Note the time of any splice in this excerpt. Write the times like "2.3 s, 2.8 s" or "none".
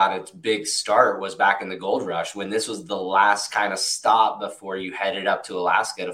none